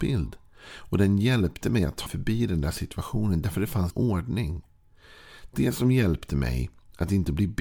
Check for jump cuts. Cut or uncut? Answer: cut